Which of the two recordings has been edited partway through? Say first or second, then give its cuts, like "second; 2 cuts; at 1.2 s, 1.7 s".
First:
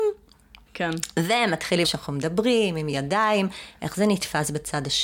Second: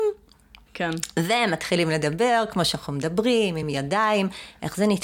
first; 1 cut; at 1.8 s